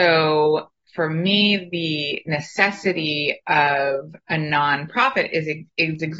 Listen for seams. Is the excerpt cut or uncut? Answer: uncut